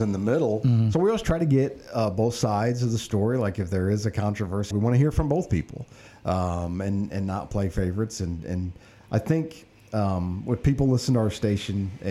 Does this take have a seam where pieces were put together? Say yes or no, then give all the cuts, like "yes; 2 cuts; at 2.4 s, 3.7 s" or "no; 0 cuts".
yes; 1 cut; at 4.7 s